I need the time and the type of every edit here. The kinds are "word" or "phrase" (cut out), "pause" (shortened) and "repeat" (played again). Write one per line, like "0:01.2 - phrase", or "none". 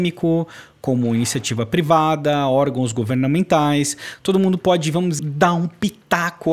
0:05.2 - word